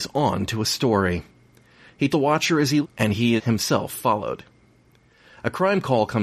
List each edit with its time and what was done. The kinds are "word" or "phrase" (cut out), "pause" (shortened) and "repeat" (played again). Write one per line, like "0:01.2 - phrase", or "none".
0:02.1 - word
0:02.8 - word
0:03.4 - word